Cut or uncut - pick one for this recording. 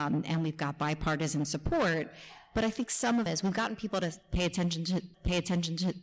cut